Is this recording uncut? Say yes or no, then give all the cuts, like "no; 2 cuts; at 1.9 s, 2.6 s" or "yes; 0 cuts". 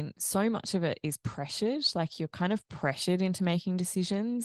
yes; 0 cuts